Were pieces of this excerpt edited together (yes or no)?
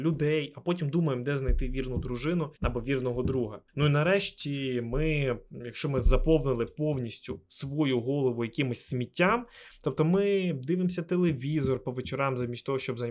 yes